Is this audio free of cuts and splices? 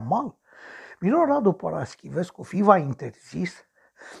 yes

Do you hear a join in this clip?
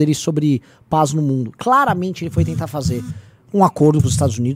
no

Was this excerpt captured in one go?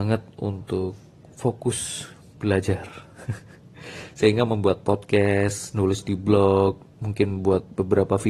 yes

